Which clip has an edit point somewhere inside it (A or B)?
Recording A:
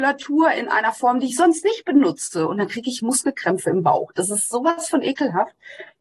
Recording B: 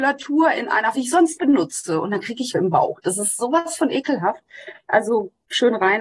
B